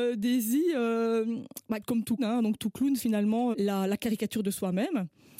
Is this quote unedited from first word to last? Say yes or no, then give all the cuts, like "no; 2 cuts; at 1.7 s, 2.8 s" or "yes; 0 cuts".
no; 4 cuts; at 1.8 s, 2.2 s, 3.0 s, 3.5 s